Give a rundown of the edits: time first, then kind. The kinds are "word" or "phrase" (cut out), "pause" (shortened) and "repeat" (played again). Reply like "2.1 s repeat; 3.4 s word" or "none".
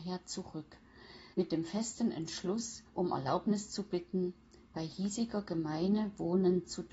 1.3 s pause; 2.9 s pause

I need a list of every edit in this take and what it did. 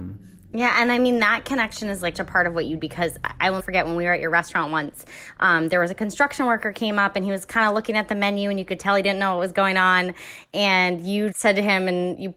2.1 s word; 2.8 s word; 3.6 s word; 11.3 s word

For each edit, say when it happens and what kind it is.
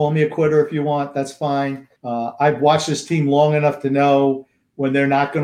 2.0 s pause

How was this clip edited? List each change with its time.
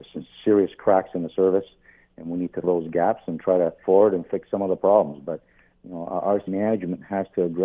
2.6 s word; 3.8 s word; 6.5 s word

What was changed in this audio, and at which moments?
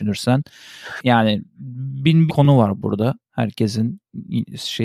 2.3 s phrase

